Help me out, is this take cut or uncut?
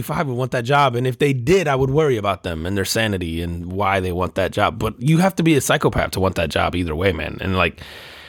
uncut